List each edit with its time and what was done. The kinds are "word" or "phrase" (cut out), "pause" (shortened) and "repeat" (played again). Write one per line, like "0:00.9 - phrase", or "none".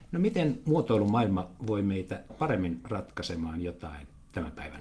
0:02.3 - word